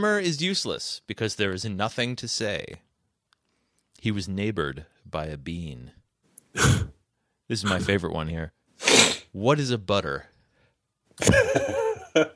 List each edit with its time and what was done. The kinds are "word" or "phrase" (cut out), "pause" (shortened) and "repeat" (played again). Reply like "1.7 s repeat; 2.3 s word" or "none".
none